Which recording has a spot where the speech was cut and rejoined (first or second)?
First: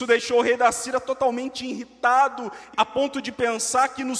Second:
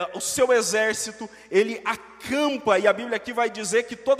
first